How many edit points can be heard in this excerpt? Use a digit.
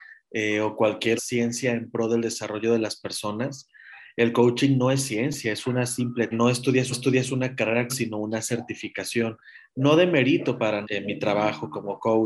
5